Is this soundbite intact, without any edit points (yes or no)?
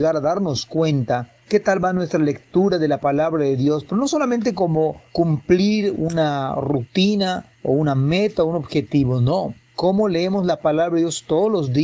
no